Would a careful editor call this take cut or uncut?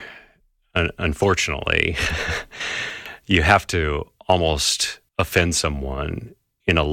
cut